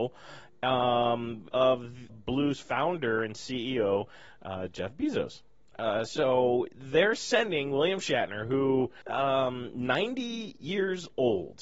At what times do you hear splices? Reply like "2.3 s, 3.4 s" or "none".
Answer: 1.5 s, 2.1 s, 9.0 s